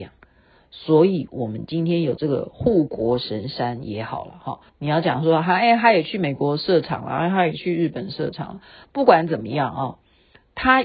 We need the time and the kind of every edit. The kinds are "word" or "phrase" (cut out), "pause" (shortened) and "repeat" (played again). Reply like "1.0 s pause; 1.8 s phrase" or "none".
4.7 s pause

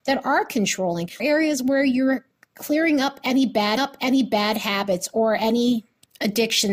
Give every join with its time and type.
1.2 s word; 3.8 s repeat

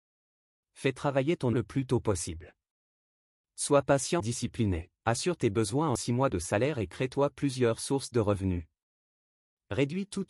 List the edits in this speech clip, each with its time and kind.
1.5 s phrase; 4.2 s word; 5.0 s pause; 6.0 s word

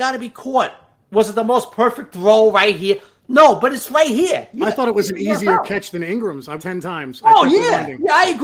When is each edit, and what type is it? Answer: 6.6 s phrase

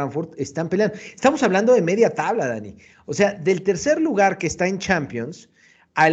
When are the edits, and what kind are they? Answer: none

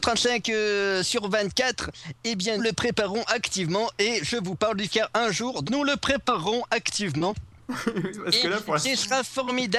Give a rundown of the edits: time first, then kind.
2.6 s word; 4.9 s word; 5.6 s word

